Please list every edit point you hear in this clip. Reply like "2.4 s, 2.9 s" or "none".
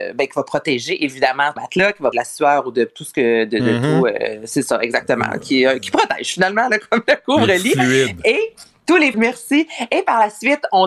1.6 s, 2.1 s, 9.1 s